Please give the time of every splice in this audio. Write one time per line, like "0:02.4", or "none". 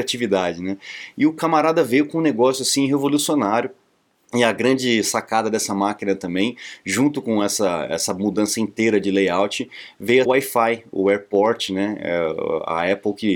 0:10.3